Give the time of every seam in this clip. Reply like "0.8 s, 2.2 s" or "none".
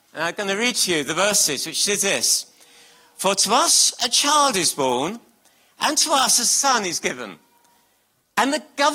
none